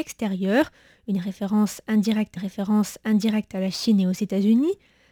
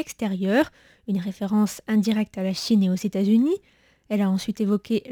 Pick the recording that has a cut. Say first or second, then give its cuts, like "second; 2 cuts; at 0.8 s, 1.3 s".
first; 1 cut; at 2.4 s